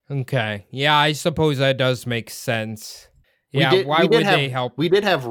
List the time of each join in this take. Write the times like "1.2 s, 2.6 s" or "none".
none